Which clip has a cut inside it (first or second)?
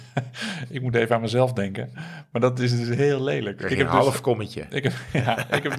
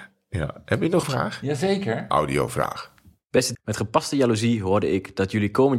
second